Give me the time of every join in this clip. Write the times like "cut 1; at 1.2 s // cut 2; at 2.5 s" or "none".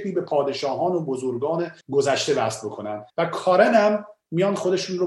cut 1; at 1.8 s // cut 2; at 3.1 s